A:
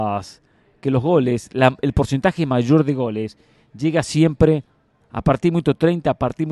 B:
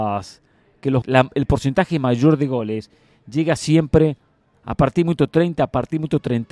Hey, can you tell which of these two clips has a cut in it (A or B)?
B